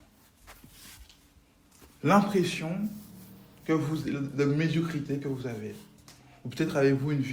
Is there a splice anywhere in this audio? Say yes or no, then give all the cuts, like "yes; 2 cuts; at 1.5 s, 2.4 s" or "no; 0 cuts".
no; 0 cuts